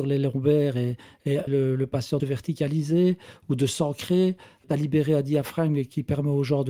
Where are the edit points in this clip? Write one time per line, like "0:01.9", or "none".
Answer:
0:01.5
0:02.2
0:04.6